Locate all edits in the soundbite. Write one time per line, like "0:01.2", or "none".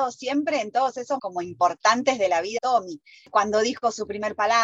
0:01.2
0:02.6